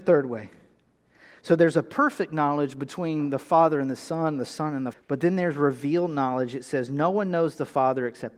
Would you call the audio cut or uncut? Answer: cut